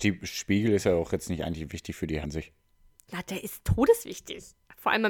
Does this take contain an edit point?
yes; 1 cut; at 2.2 s

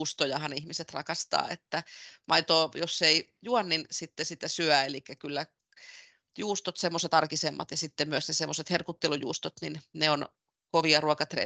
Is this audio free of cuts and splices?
yes; 0 cuts

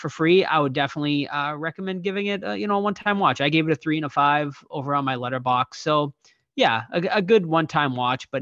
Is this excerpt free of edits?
yes; 0 cuts

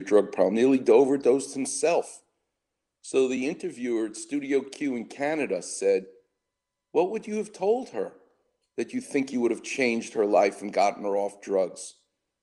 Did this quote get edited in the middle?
no; 0 cuts

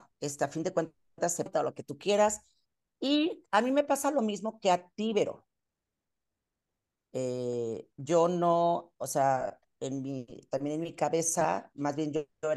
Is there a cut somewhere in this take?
yes; 1 cut; at 1.5 s

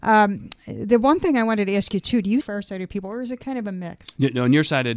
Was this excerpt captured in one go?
no; 1 cut; at 2.4 s

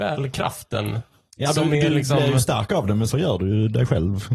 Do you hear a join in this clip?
yes; 1 cut; at 3.1 s

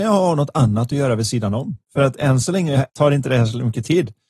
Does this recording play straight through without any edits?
no; 2 cuts; at 1.8 s, 2.9 s

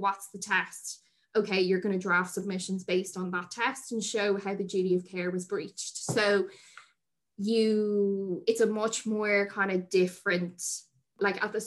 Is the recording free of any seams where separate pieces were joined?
yes; 0 cuts

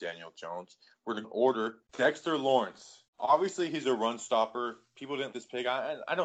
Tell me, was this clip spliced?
yes; 4 cuts; at 1.2 s, 1.9 s, 3.1 s, 5.3 s

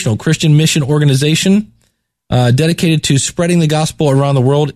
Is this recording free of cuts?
yes; 0 cuts

